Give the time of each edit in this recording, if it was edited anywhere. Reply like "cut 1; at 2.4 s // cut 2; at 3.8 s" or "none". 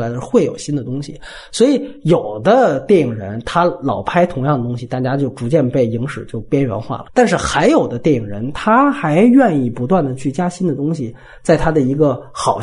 none